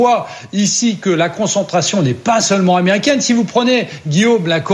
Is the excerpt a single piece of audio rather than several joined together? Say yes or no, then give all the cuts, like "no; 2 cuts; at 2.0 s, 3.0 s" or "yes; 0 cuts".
yes; 0 cuts